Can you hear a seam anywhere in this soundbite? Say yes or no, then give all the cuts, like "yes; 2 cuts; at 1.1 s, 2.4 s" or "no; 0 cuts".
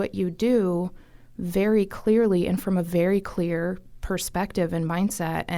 no; 0 cuts